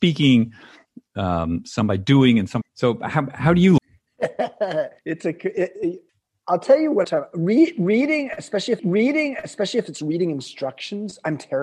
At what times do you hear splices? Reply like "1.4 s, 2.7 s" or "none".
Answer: 2.6 s, 3.8 s, 5.0 s, 6.1 s, 7.0 s, 8.8 s